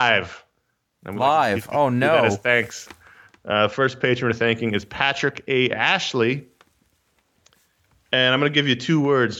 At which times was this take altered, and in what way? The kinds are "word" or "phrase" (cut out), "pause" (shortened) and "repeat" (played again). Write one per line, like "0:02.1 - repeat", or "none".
none

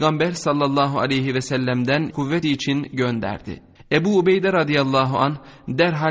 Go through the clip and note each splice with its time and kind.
0:02.1 - word
0:02.4 - word
0:03.8 - pause

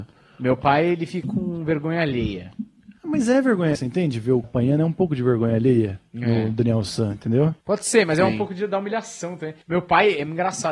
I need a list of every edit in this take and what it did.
0:01.2 - word
0:03.0 - pause
0:03.8 - word
0:04.4 - word
0:07.6 - pause
0:09.6 - pause

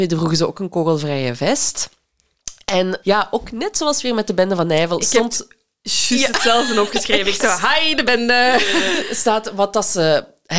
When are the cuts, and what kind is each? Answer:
0:03.0 - word

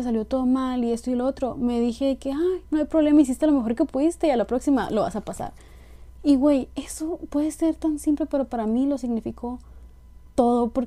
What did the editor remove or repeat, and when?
0:02.7 - pause

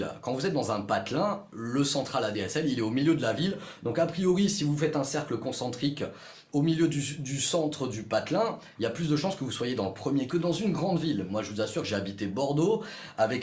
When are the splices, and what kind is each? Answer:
0:10.3 - word

